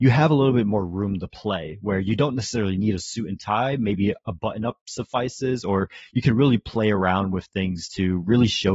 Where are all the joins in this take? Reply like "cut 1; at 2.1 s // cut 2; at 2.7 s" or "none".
none